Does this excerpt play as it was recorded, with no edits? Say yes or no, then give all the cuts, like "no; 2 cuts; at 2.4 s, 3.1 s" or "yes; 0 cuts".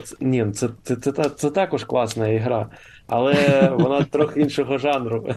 yes; 0 cuts